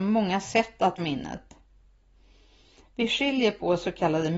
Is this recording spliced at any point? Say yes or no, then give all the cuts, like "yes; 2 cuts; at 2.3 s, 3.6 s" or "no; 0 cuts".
yes; 1 cut; at 1.0 s